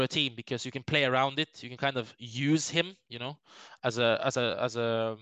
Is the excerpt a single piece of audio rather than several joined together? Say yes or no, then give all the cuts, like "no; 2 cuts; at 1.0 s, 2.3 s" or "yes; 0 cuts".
yes; 0 cuts